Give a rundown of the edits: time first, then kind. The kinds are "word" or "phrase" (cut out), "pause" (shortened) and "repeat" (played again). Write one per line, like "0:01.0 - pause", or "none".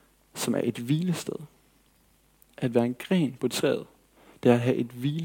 none